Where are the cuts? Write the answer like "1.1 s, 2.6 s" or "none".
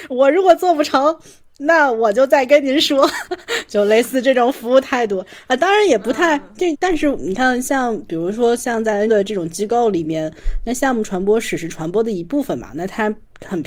6.7 s, 9.1 s